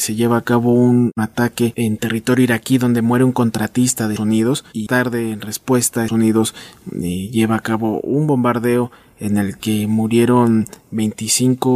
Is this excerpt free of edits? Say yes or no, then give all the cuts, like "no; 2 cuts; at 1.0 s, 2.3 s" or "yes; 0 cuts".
no; 3 cuts; at 4.2 s, 4.9 s, 6.1 s